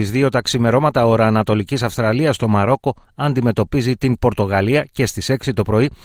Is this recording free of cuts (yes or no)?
yes